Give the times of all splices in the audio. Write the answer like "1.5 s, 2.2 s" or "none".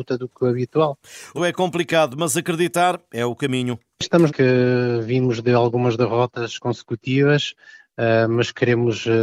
1.4 s, 4.3 s